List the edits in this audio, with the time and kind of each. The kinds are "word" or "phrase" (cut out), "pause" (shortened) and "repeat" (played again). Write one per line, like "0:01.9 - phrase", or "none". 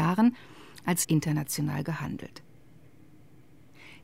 0:01.0 - phrase